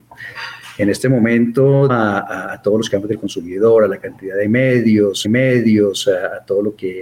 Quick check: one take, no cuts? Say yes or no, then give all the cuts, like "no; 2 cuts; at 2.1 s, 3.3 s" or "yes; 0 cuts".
no; 2 cuts; at 1.9 s, 5.2 s